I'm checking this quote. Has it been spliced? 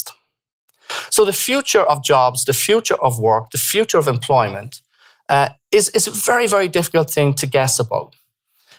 no; 0 cuts

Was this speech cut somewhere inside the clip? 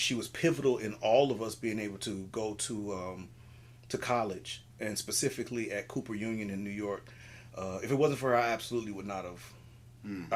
no; 0 cuts

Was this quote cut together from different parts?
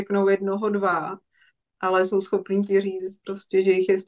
no; 0 cuts

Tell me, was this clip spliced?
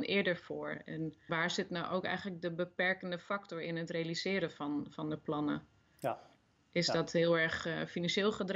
yes; 1 cut; at 1.3 s

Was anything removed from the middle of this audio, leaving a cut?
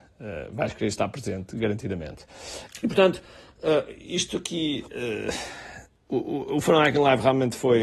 no; 0 cuts

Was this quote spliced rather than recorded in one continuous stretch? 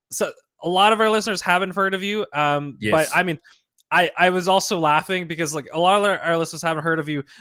no; 0 cuts

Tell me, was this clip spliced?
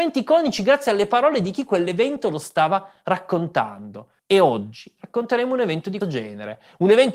yes; 2 cuts; at 4.2 s, 6.0 s

